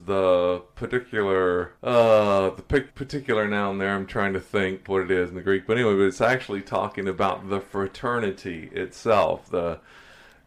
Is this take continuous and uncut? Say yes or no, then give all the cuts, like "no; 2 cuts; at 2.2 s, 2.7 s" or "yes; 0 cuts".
no; 3 cuts; at 1.8 s, 2.9 s, 4.8 s